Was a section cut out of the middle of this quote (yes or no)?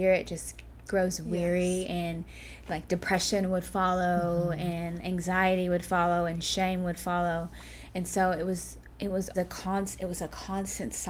yes